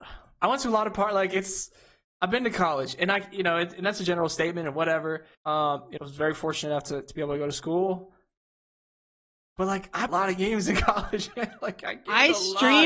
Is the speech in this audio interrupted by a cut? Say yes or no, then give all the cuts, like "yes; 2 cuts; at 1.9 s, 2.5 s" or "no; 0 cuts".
yes; 3 cuts; at 5.3 s, 6.0 s, 10.1 s